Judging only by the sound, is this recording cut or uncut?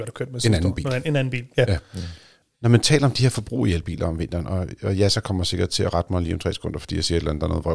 uncut